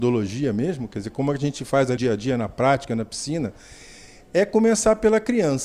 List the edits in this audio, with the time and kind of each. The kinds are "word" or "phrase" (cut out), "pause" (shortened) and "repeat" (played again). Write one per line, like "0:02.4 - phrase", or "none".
0:02.0 - word